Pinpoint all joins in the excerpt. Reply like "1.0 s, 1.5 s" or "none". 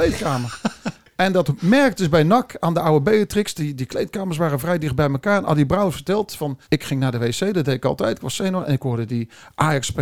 6.6 s